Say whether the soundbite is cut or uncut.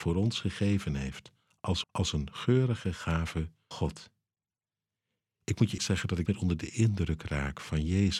cut